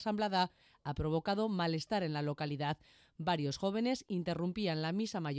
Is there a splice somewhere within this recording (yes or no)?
no